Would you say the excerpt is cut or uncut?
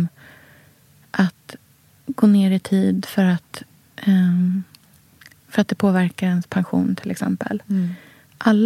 uncut